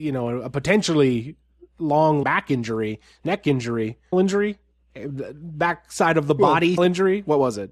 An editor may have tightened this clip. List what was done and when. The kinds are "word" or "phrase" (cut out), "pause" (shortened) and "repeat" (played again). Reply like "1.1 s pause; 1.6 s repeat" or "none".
2.2 s word; 4.1 s word; 6.8 s word